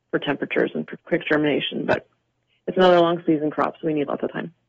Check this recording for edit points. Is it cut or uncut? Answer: cut